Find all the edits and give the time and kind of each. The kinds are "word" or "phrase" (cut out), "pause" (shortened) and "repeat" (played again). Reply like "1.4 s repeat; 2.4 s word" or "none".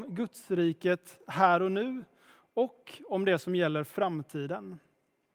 none